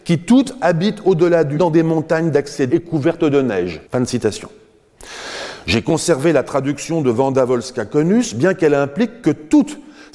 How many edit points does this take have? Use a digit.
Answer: 3